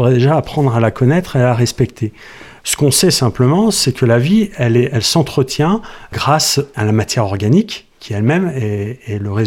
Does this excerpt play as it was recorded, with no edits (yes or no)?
yes